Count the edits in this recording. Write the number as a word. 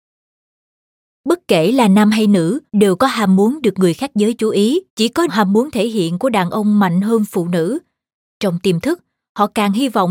three